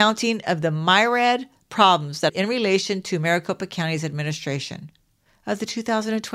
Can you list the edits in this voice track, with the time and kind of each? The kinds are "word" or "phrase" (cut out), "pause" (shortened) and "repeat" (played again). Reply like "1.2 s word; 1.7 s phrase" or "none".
2.3 s word